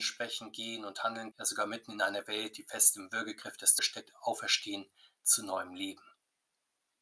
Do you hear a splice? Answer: yes; 2 cuts; at 1.3 s, 3.8 s

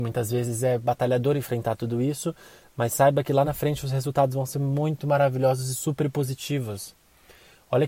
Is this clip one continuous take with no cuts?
yes; 0 cuts

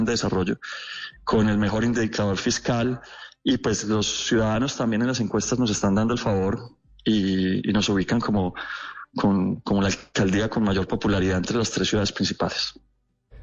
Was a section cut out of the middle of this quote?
no; 0 cuts

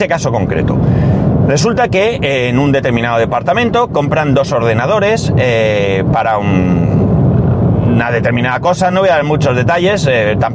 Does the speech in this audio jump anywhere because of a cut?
no; 0 cuts

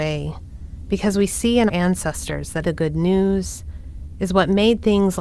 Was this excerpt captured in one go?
no; 2 cuts; at 1.7 s, 2.6 s

